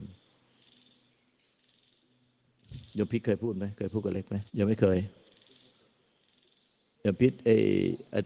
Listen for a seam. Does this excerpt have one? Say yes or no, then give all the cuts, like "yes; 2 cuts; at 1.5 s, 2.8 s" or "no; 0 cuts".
yes; 1 cut; at 4.5 s